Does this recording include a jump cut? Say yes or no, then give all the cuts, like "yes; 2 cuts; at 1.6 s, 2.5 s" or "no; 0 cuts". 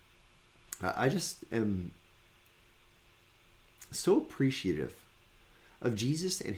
no; 0 cuts